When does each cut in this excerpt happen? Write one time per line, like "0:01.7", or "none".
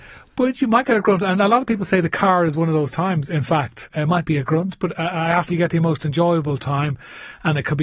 0:03.9
0:05.5